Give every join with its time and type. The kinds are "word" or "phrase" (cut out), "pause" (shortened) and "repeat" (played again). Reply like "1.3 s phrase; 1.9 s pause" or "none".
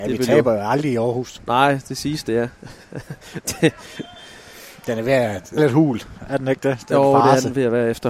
5.6 s word